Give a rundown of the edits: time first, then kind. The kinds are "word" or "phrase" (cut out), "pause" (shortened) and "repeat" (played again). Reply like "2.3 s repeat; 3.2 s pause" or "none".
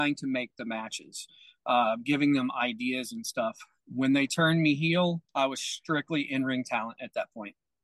5.3 s pause